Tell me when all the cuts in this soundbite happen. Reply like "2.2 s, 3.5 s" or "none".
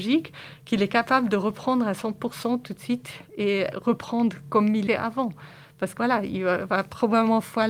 3.7 s, 4.9 s, 6.0 s